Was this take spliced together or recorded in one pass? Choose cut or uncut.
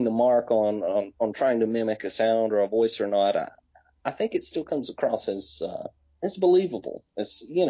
uncut